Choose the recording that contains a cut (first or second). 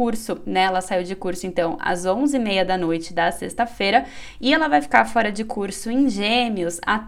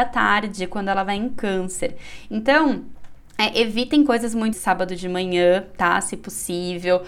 second